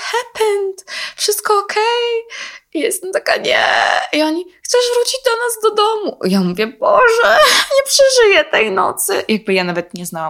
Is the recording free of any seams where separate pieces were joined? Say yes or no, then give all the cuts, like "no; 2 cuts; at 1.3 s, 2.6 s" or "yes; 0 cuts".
yes; 0 cuts